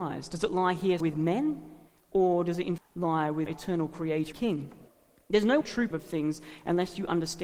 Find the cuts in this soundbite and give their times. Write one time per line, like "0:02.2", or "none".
0:01.0
0:01.9
0:02.8
0:03.5
0:04.3
0:04.9
0:05.6
0:05.9